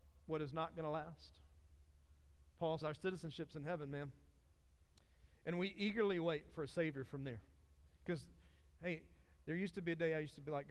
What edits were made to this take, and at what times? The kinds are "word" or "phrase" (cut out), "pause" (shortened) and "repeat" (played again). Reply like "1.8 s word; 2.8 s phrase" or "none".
2.8 s word